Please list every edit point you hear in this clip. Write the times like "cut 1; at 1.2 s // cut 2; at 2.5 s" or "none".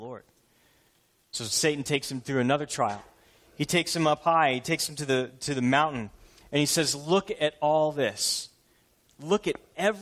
none